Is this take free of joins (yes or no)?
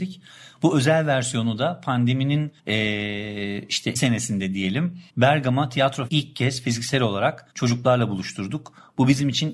no